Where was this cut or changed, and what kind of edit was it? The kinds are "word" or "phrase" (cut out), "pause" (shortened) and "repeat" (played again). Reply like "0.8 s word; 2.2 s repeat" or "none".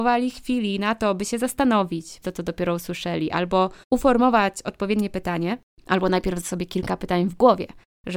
2.2 s word; 3.8 s pause; 5.8 s pause; 6.4 s word